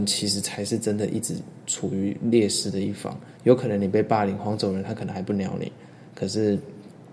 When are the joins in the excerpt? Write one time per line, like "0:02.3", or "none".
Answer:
0:03.4
0:06.1